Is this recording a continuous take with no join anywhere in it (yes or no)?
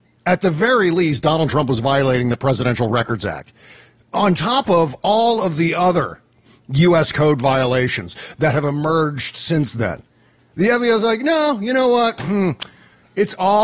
yes